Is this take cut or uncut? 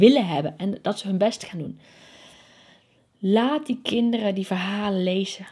uncut